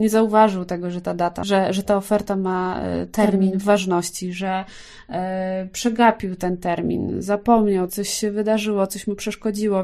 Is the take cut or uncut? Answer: cut